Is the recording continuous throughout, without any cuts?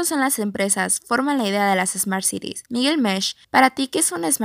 no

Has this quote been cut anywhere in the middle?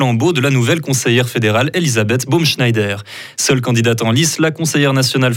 no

